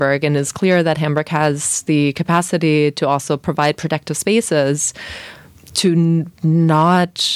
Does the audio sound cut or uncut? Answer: cut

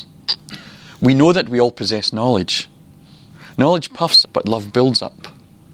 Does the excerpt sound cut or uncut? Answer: cut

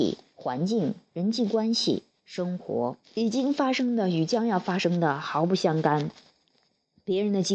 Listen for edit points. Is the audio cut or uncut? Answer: cut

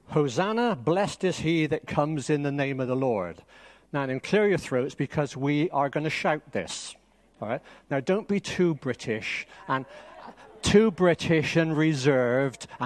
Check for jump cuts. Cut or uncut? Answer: uncut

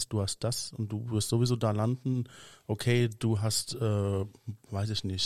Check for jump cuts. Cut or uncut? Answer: uncut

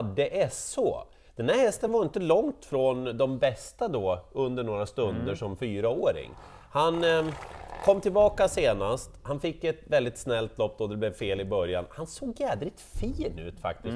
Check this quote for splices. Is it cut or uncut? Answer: uncut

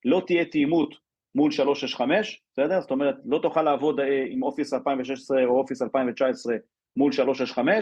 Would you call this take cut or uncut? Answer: uncut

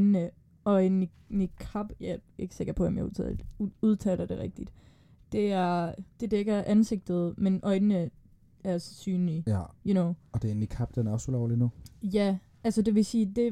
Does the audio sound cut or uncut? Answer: uncut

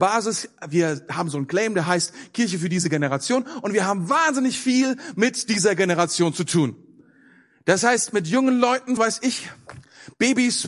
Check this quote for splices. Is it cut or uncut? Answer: cut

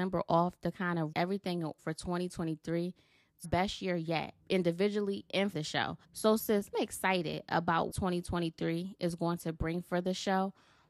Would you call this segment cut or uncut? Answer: cut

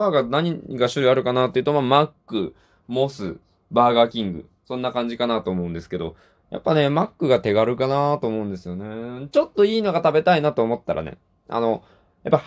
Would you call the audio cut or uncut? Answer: uncut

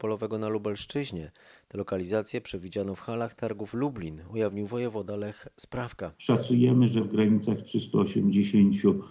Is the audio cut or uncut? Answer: cut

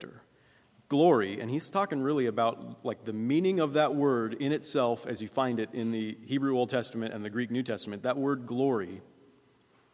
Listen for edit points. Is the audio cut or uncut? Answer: uncut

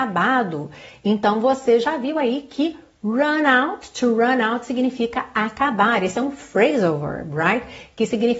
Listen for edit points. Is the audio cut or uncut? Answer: uncut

